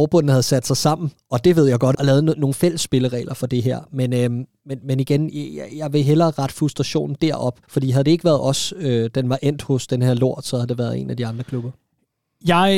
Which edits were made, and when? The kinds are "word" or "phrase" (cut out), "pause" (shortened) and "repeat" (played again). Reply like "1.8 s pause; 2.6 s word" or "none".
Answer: 1.9 s phrase; 7.6 s pause